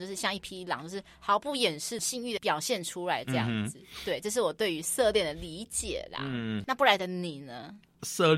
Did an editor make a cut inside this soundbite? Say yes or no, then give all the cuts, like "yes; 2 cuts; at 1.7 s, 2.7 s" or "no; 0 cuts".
no; 0 cuts